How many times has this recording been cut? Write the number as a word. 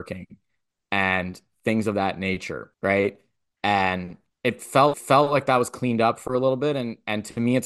three